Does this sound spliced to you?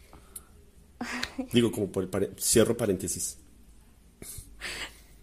no; 0 cuts

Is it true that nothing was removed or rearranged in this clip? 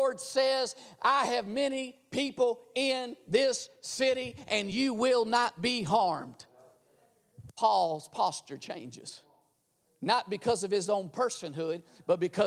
yes; 0 cuts

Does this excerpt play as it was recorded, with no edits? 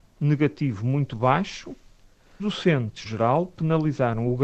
no; 2 cuts; at 2.4 s, 3.0 s

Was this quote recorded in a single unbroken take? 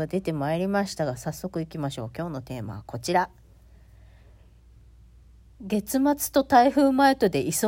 yes; 0 cuts

